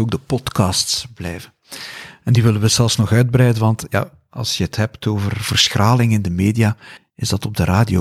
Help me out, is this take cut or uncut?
uncut